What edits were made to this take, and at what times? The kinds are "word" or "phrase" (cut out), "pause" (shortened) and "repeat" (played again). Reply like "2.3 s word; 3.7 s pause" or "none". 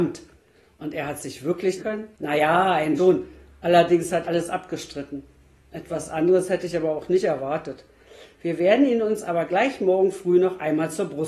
1.8 s phrase; 2.1 s pause; 3.0 s word; 4.2 s word